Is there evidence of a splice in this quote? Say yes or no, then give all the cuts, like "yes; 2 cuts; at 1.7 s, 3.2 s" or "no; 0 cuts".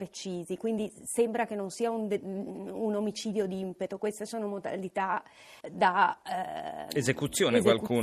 yes; 1 cut; at 5.6 s